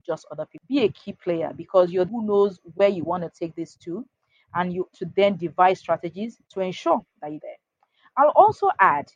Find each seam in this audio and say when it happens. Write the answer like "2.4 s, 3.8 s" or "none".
2.1 s, 4.9 s, 6.4 s, 7.4 s